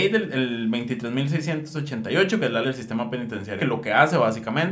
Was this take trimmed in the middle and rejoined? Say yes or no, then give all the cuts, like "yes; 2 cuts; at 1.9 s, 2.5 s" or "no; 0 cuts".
yes; 2 cuts; at 2.6 s, 3.6 s